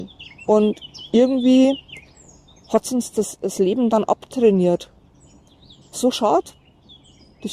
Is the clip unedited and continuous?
yes; 0 cuts

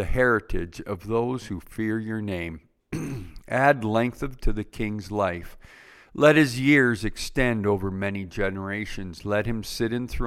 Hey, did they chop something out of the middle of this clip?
yes; 1 cut; at 4.4 s

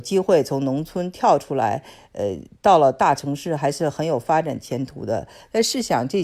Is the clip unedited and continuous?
yes; 0 cuts

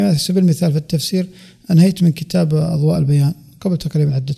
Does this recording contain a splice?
no; 0 cuts

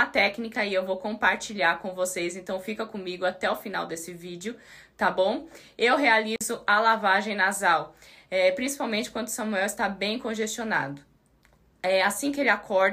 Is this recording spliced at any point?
no; 0 cuts

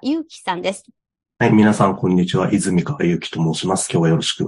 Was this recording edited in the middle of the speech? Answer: no; 0 cuts

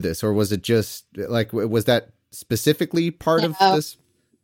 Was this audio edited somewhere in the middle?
no; 0 cuts

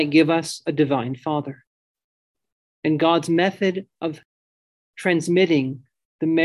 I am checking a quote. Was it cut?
no; 0 cuts

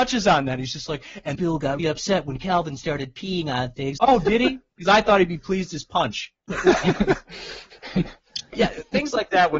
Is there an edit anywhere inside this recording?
yes; 4 cuts; at 1.3 s, 1.8 s, 4.0 s, 8.5 s

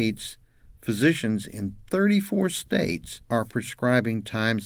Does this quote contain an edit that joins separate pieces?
yes; 1 cut; at 3.2 s

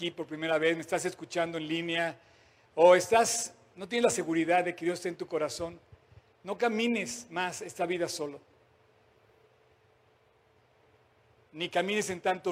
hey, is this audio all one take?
yes; 0 cuts

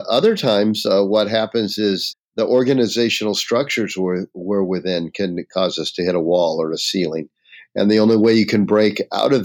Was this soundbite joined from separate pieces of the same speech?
yes; 1 cut; at 2.1 s

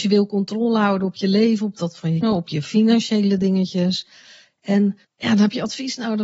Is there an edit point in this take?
yes; 2 cuts; at 2.2 s, 5.0 s

